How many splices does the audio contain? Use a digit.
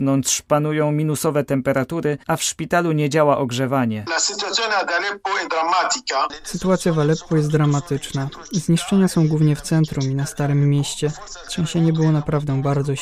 1